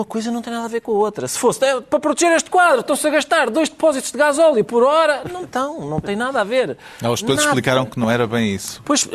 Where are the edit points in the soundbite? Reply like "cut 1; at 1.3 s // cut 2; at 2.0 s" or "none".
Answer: none